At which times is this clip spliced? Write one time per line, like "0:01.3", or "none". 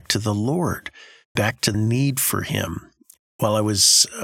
0:01.4
0:01.7